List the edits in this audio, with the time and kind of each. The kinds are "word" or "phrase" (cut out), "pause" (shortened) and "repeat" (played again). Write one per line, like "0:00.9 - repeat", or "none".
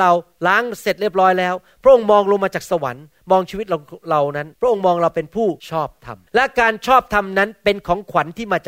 0:04.5 - pause
0:05.6 - pause
0:06.3 - pause